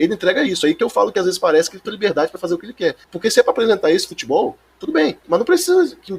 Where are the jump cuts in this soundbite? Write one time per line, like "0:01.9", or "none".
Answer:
0:01.8
0:03.0
0:05.2